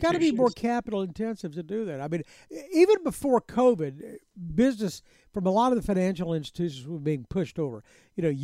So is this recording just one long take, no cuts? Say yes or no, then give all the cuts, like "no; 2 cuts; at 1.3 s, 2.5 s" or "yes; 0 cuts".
yes; 0 cuts